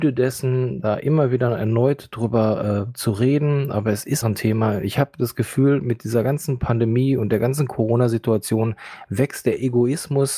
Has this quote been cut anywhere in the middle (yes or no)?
yes